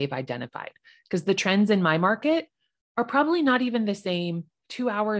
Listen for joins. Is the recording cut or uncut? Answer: uncut